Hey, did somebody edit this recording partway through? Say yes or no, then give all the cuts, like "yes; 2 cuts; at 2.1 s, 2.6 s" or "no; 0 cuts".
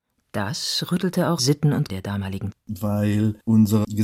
yes; 3 cuts; at 1.4 s, 1.9 s, 2.5 s